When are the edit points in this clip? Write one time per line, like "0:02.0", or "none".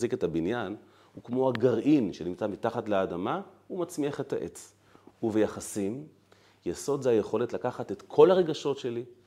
none